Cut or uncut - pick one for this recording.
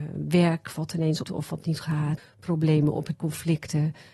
cut